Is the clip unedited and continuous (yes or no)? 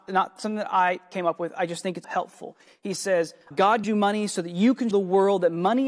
no